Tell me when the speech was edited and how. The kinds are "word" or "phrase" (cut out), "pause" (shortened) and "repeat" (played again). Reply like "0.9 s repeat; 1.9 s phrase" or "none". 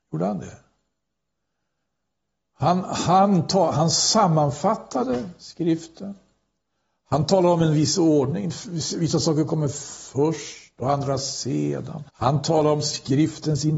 12.1 s pause